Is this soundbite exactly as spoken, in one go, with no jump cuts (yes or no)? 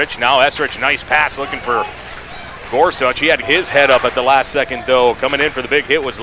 no